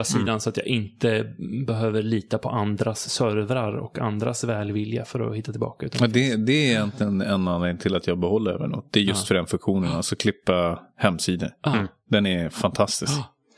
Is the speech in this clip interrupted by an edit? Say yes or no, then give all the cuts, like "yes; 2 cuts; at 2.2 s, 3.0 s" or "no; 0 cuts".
no; 0 cuts